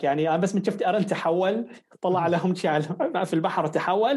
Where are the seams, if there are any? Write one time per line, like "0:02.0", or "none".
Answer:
none